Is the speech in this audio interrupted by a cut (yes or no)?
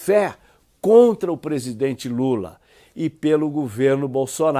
no